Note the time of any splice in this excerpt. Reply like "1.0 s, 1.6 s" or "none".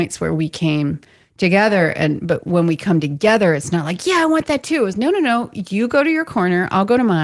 4.9 s